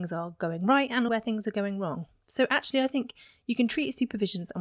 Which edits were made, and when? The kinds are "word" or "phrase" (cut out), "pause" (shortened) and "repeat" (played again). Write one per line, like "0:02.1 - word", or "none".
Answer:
0:01.1 - word